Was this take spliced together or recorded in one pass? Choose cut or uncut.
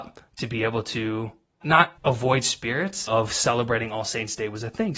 cut